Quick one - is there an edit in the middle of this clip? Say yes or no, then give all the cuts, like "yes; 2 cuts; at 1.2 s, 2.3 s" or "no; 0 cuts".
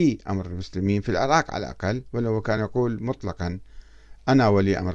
no; 0 cuts